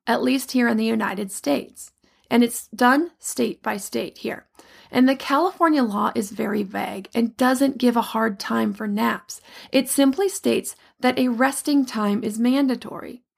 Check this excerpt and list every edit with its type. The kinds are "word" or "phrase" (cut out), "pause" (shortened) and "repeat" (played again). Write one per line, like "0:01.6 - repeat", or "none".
none